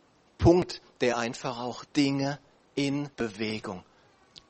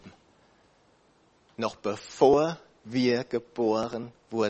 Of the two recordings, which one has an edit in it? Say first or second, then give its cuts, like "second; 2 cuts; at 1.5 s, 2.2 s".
first; 2 cuts; at 1.9 s, 3.1 s